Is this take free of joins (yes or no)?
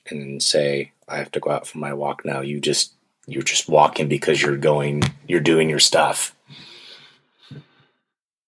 yes